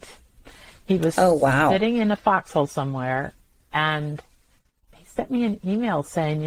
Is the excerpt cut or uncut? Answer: uncut